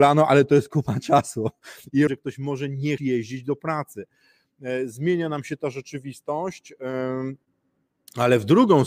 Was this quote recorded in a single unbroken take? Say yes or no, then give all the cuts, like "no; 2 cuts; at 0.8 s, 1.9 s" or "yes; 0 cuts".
no; 2 cuts; at 2.1 s, 3.0 s